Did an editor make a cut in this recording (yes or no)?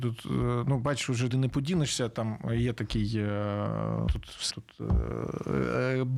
yes